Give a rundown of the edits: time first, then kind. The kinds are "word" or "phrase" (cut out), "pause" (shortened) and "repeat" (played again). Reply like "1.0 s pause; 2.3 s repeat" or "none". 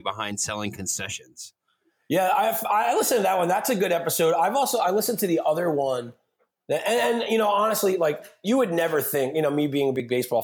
none